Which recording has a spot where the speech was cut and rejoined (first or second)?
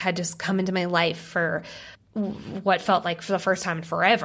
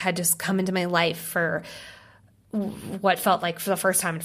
first